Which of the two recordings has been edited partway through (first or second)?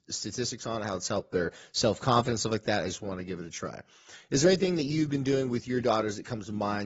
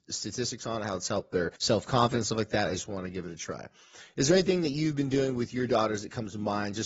second